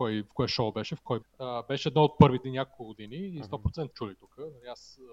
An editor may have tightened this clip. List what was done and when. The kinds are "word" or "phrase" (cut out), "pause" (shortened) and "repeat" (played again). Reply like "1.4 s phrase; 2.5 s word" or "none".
1.2 s word; 2.4 s word; 3.9 s word

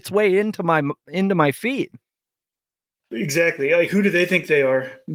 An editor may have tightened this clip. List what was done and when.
none

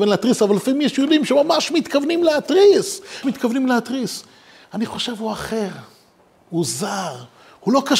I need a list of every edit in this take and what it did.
3.2 s word

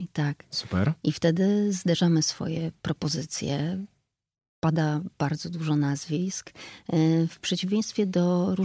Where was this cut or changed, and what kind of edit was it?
none

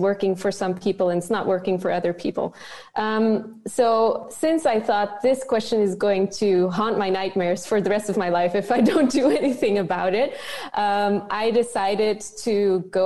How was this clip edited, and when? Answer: none

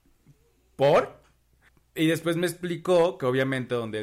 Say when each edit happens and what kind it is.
1.7 s pause

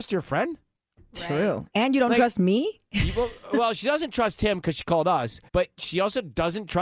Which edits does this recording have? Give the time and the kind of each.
5.5 s pause

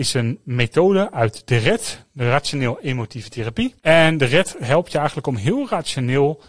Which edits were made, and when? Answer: 3.8 s pause

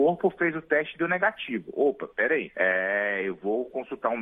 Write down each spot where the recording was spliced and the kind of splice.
2.5 s pause

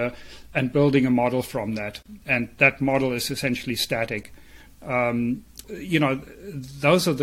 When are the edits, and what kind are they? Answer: 2.2 s pause; 5.6 s word

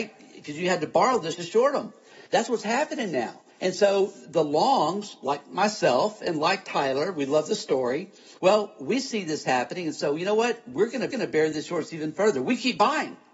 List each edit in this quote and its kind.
1.3 s word; 2.3 s pause; 3.5 s pause; 8.4 s pause; 11.1 s repeat

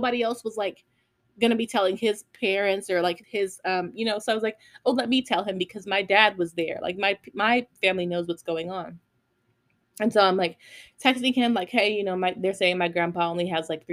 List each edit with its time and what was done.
3.2 s word

